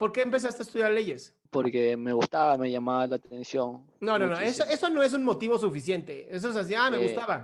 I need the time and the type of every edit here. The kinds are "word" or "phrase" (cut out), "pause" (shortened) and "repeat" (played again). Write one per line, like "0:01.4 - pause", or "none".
0:01.5 - pause
0:03.9 - pause